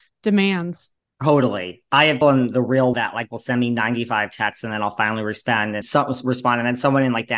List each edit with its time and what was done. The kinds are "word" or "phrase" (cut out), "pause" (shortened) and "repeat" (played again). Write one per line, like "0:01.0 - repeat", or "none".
0:01.0 - pause
0:02.2 - word
0:02.9 - word
0:05.8 - word